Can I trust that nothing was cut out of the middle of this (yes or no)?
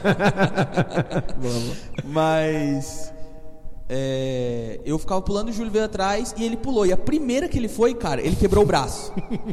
yes